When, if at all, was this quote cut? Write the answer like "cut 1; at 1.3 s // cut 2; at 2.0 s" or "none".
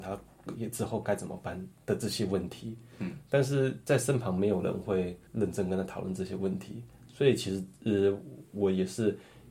cut 1; at 5.3 s